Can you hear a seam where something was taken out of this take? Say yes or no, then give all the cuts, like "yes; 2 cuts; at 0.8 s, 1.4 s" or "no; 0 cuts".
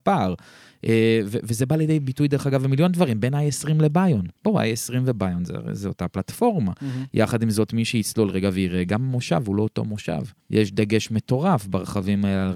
yes; 2 cuts; at 4.4 s, 10.4 s